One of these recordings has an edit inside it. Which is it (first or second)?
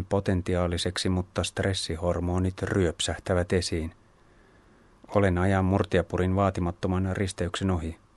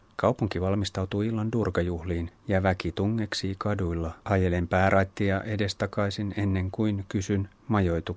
second